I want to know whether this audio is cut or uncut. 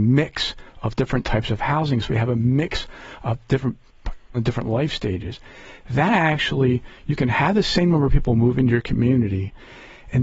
cut